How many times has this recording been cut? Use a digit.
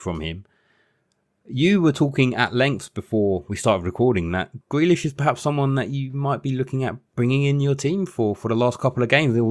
2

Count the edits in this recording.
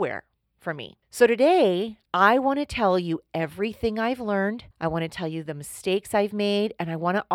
1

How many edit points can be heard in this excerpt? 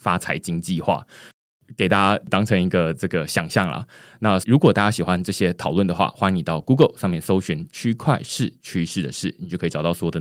0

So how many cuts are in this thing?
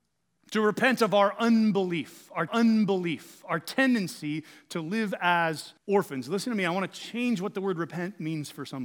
2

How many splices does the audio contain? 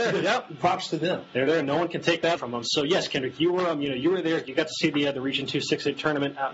1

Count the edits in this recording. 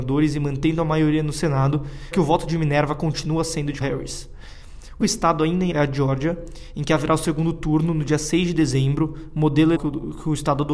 5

